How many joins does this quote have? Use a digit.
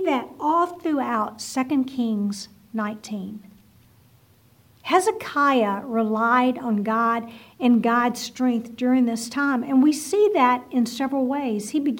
0